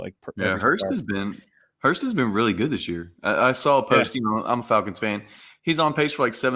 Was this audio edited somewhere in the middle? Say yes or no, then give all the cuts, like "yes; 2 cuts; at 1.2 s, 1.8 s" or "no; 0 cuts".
no; 0 cuts